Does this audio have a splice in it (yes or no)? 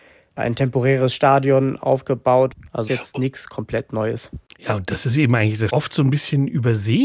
yes